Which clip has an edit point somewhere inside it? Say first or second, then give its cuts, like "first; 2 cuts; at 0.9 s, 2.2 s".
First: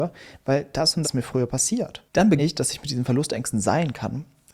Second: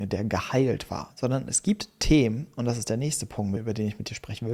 first; 2 cuts; at 1.0 s, 2.4 s